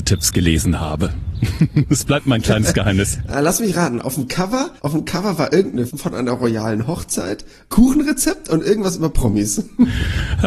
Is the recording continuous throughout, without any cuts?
no; 3 cuts; at 4.8 s, 5.9 s, 7.7 s

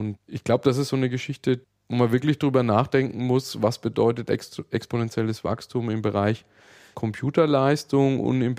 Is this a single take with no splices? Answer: yes; 0 cuts

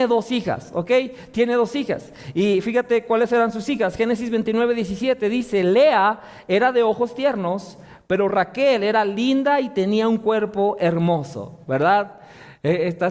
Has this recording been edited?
no; 0 cuts

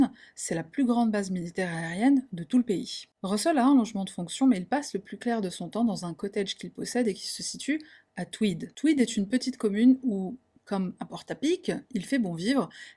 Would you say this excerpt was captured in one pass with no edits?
yes; 0 cuts

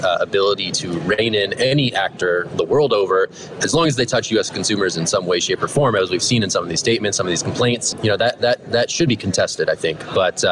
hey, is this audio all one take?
yes; 0 cuts

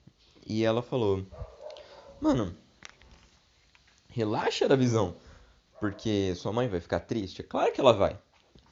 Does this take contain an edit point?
no; 0 cuts

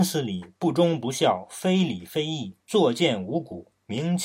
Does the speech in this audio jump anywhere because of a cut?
yes; 1 cut; at 2.6 s

